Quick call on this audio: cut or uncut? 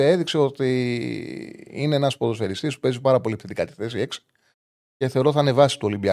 uncut